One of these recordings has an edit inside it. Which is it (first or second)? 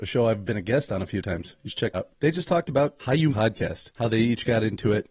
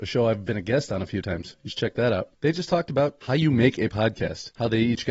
first